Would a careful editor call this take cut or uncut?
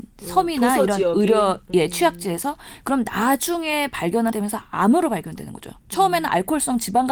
cut